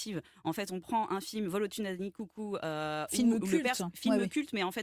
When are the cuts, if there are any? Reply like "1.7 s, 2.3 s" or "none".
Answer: none